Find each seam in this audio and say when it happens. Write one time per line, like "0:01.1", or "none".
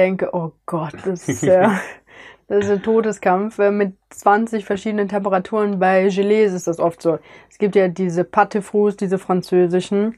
none